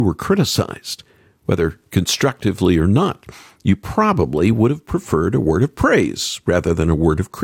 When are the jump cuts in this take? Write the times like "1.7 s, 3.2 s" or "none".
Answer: none